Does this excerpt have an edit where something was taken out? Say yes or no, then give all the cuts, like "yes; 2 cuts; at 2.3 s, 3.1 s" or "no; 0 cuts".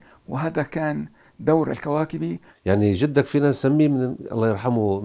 no; 0 cuts